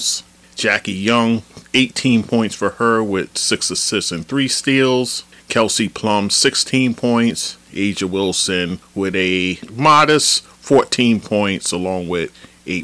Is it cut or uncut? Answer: uncut